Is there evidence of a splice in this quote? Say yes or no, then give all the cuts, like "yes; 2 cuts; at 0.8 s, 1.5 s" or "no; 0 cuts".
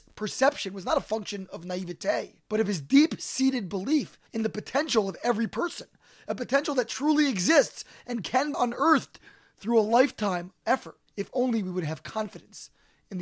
yes; 5 cuts; at 2.5 s, 4.3 s, 8.5 s, 10.6 s, 11.1 s